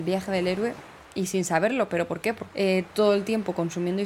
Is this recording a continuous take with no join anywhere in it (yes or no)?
no